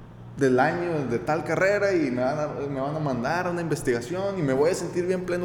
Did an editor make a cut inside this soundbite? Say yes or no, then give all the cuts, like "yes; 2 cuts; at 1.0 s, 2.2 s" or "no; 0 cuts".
no; 0 cuts